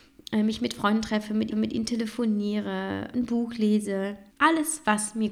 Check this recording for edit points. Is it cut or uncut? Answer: cut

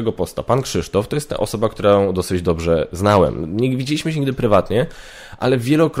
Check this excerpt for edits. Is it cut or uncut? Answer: uncut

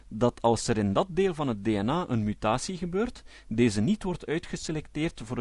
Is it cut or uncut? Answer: uncut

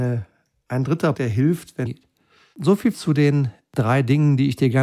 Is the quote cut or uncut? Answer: cut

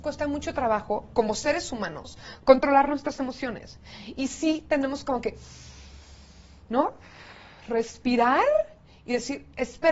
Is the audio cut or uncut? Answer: uncut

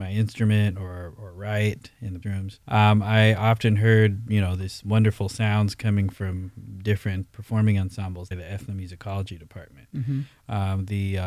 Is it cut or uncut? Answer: cut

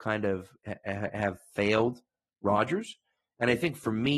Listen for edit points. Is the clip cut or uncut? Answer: uncut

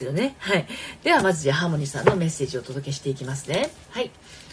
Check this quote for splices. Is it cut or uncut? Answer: uncut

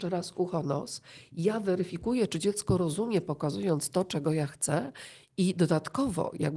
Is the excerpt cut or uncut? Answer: uncut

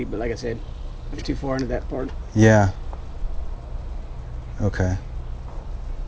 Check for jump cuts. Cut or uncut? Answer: cut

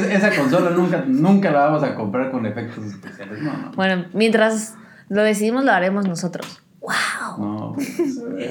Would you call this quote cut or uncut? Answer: uncut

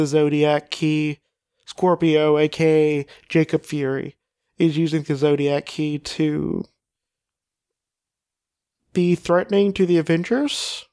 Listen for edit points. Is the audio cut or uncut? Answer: uncut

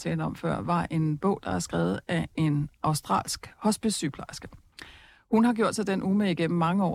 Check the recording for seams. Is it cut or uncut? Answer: uncut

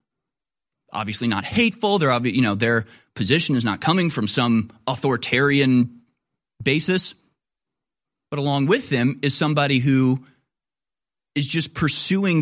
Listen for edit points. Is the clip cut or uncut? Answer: uncut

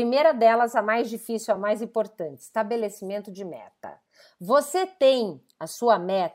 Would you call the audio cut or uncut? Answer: uncut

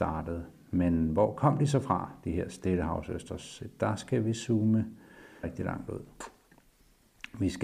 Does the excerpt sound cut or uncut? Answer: cut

